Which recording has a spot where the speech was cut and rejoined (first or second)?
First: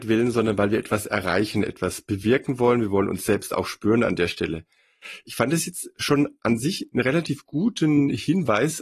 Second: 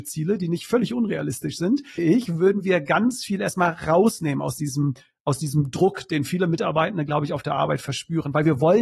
second